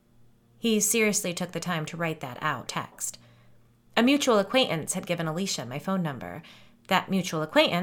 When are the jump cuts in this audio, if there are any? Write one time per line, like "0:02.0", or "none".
0:02.7